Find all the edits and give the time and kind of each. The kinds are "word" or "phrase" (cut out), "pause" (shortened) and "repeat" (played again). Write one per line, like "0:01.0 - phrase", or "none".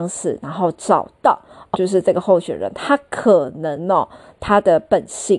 0:01.7 - word